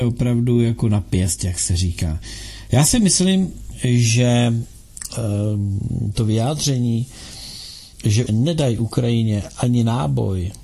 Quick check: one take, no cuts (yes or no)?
no